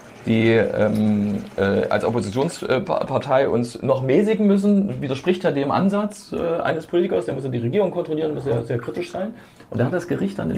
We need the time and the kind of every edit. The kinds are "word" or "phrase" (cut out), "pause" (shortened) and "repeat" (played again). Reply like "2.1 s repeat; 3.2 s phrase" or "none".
none